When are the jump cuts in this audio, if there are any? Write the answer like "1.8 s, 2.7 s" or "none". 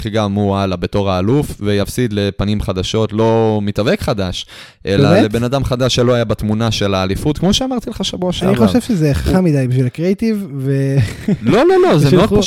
none